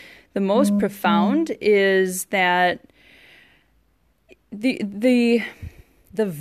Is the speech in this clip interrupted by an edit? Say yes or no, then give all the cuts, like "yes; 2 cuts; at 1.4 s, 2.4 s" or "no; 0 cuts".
no; 0 cuts